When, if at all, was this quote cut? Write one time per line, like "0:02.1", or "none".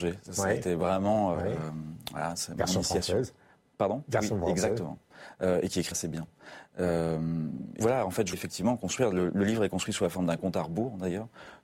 0:01.3
0:05.9
0:07.8
0:08.3

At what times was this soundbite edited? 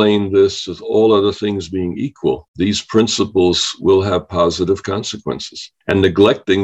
none

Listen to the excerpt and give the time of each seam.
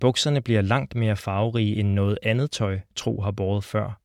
none

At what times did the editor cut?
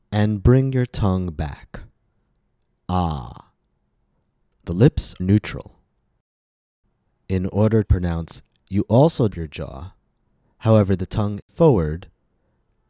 0:05.2
0:07.8
0:08.6
0:09.3
0:11.4

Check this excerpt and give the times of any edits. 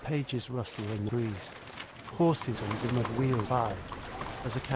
0:01.1
0:02.5
0:02.9
0:03.5

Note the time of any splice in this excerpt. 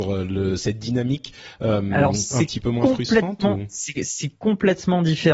none

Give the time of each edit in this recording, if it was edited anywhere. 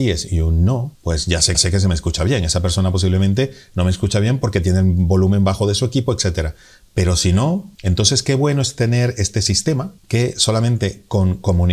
0:00.9
0:01.5
0:07.7
0:10.0

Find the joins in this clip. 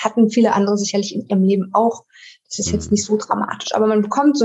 none

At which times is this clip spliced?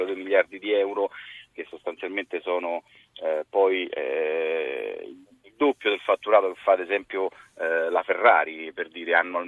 none

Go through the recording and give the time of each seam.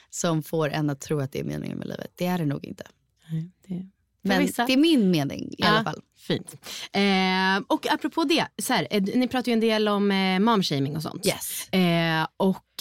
none

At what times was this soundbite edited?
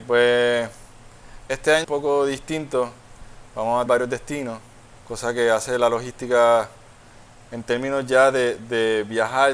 0:01.8
0:03.9
0:05.0

